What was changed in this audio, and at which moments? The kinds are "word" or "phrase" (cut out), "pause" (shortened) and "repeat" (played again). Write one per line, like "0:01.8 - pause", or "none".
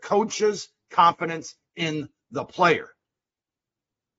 none